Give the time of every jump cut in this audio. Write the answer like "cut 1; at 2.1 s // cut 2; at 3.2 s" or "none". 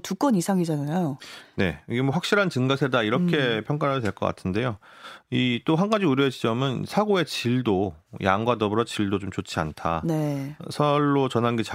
none